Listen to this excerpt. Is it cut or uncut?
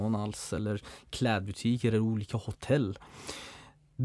uncut